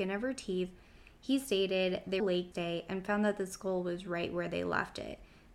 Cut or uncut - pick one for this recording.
cut